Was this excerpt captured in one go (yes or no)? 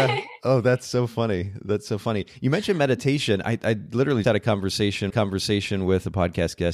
no